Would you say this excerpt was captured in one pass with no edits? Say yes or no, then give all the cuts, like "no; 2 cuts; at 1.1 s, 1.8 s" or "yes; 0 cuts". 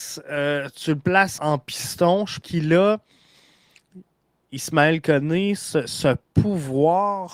no; 2 cuts; at 1.4 s, 2.4 s